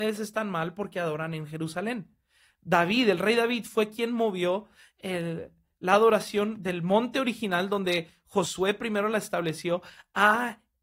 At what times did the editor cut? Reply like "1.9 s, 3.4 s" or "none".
none